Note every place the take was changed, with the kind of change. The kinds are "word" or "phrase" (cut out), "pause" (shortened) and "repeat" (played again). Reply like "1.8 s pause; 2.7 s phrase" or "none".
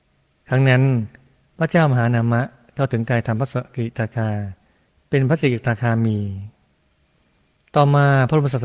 none